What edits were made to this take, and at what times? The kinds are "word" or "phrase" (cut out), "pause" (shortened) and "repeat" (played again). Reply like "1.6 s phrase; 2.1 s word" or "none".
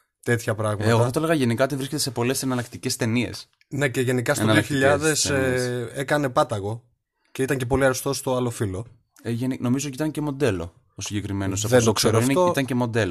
none